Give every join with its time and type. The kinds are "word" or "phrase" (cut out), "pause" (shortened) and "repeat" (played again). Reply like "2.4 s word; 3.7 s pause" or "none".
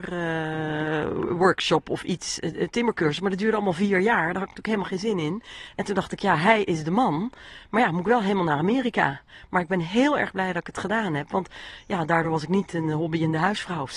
none